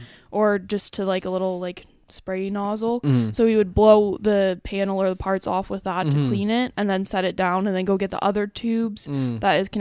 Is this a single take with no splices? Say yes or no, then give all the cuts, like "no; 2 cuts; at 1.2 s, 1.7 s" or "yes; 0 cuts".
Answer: yes; 0 cuts